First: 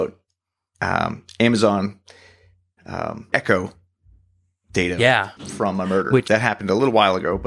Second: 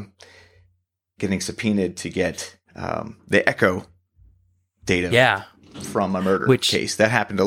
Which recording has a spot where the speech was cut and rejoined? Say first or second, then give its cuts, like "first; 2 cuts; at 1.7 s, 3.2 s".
first; 4 cuts; at 2.8 s, 3.3 s, 5.4 s, 6.3 s